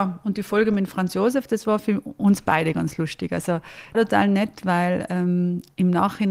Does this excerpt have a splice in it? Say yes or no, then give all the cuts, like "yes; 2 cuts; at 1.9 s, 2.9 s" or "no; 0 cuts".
yes; 1 cut; at 3.9 s